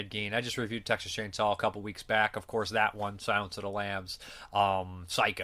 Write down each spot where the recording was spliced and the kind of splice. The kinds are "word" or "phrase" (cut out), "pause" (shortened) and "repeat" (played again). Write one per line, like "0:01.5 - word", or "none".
none